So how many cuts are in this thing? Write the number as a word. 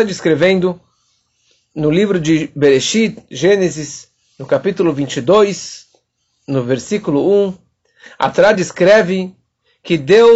zero